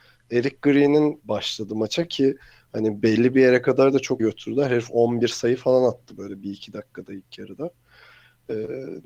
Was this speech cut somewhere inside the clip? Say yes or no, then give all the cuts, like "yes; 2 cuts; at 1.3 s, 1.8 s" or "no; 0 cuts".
yes; 2 cuts; at 1.2 s, 4.2 s